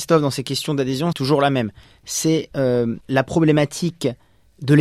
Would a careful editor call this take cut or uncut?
cut